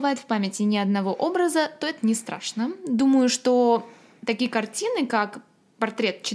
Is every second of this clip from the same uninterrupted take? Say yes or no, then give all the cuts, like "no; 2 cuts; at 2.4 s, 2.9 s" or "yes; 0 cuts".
yes; 0 cuts